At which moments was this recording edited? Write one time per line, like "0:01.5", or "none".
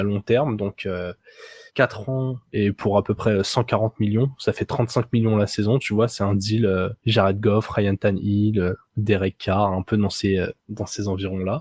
0:01.7
0:02.5
0:07.0
0:08.9
0:10.6